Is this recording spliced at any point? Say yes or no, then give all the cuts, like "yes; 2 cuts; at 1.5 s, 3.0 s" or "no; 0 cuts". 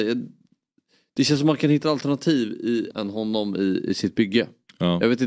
yes; 2 cuts; at 1.8 s, 2.9 s